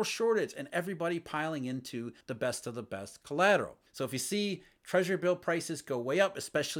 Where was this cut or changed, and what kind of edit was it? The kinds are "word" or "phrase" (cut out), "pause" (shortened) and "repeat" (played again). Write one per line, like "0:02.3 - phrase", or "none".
0:02.2 - pause
0:03.9 - pause